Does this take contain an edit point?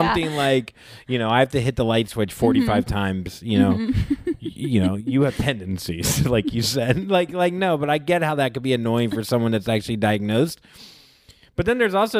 no; 0 cuts

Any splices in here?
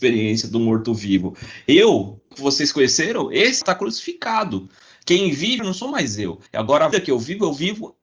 yes; 5 cuts; at 2.3 s, 3.6 s, 5.6 s, 6.5 s, 6.9 s

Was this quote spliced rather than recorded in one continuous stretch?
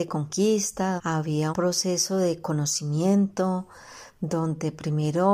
yes; 2 cuts; at 1.0 s, 1.5 s

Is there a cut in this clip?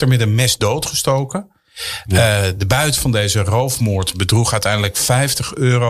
no; 0 cuts

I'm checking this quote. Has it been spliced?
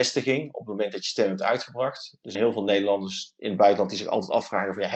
yes; 1 cut; at 2.3 s

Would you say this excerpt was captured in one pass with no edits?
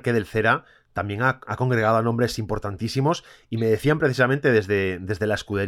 yes; 0 cuts

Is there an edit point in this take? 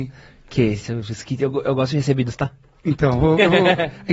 no; 0 cuts

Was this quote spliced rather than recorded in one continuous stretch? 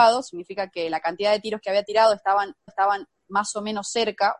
yes; 1 cut; at 2.7 s

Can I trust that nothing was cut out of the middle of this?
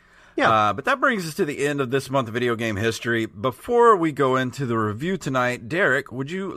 yes; 0 cuts

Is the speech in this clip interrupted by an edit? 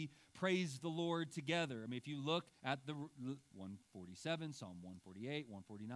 yes; 2 cuts; at 2.6 s, 3.5 s

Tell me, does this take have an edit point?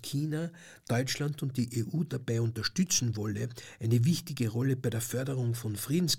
no; 0 cuts

